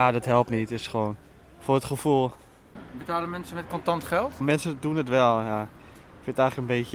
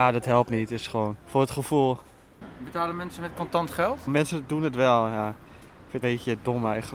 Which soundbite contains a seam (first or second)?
second